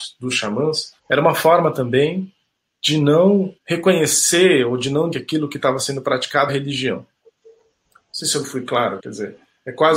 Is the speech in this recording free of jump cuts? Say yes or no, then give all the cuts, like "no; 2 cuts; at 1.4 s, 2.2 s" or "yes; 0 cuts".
no; 5 cuts; at 1.0 s, 3.6 s, 5.1 s, 6.5 s, 9.0 s